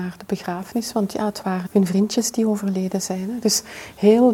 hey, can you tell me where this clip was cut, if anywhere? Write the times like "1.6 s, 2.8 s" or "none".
1.7 s